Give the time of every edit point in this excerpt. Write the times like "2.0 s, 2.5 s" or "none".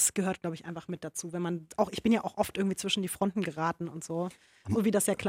none